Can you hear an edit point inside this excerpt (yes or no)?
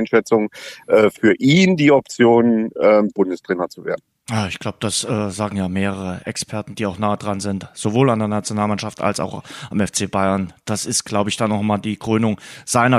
no